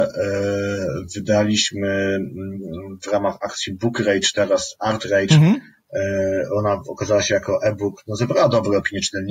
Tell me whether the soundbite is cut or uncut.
uncut